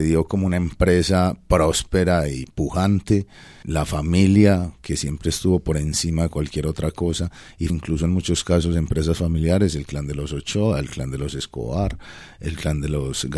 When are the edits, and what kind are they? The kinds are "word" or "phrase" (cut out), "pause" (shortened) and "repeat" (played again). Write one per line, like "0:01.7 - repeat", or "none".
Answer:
0:03.6 - word
0:07.7 - word